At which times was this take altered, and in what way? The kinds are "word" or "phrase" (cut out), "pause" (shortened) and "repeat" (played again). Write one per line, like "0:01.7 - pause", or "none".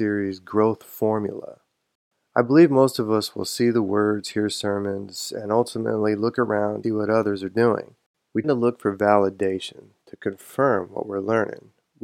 0:06.8 - word
0:08.4 - word